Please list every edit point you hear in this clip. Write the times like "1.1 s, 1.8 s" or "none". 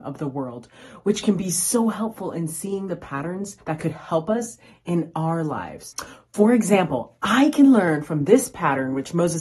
3.6 s